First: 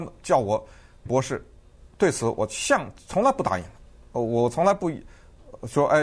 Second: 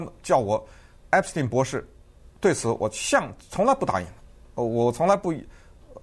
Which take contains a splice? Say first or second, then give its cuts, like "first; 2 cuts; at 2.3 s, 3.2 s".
first; 1 cut; at 1.1 s